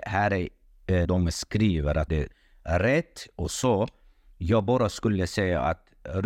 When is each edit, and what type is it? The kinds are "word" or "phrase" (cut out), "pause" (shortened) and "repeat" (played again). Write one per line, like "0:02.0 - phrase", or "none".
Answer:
0:01.0 - word
0:02.1 - word